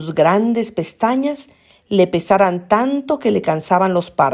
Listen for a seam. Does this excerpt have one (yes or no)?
no